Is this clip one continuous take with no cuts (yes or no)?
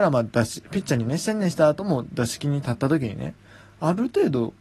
yes